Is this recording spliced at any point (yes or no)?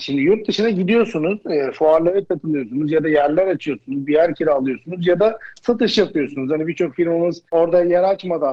yes